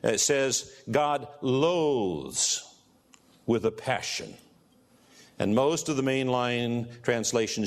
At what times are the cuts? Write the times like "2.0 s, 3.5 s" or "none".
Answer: none